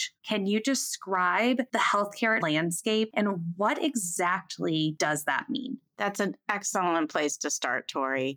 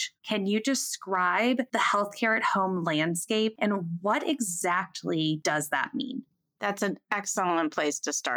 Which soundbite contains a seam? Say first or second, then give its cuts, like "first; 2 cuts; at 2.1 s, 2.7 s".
first; 2 cuts; at 2.4 s, 5.9 s